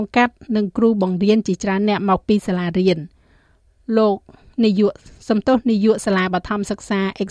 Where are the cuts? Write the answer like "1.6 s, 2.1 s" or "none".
none